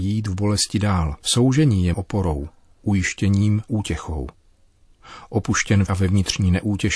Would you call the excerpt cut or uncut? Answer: cut